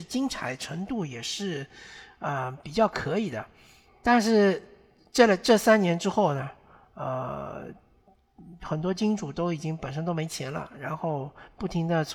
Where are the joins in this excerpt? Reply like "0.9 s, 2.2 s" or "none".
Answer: none